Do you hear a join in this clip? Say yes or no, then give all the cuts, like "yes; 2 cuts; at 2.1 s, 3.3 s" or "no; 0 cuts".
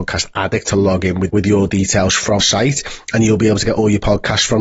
yes; 2 cuts; at 1.3 s, 2.4 s